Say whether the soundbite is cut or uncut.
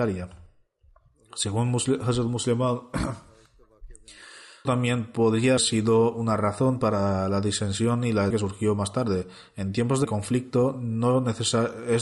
cut